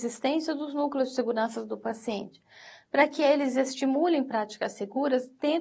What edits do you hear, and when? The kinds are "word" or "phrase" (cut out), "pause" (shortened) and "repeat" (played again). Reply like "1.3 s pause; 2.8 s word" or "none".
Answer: none